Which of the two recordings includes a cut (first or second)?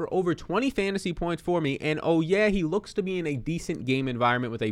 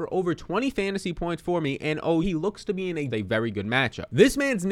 second